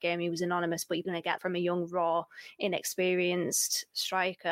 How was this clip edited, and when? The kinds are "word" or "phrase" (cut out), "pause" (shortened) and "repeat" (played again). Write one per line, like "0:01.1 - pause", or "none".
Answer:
0:01.0 - word
0:01.4 - word